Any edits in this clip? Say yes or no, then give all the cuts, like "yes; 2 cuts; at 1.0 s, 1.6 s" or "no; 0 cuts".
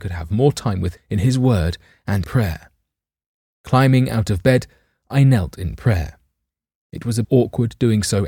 yes; 3 cuts; at 1.0 s, 2.2 s, 7.2 s